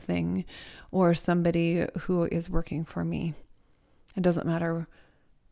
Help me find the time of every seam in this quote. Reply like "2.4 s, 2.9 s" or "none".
none